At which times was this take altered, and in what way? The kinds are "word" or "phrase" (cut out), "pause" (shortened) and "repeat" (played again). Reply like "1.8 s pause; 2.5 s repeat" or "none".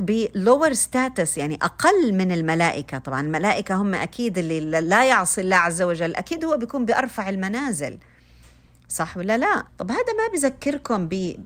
9.7 s pause